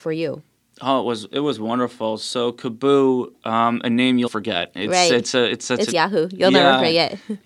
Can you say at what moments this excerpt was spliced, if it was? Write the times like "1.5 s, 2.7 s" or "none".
4.3 s, 5.9 s